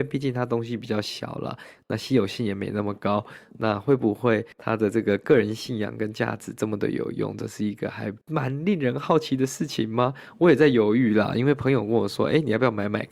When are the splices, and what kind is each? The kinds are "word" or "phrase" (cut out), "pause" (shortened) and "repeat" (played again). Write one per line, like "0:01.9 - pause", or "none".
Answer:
0:04.5 - pause
0:08.2 - pause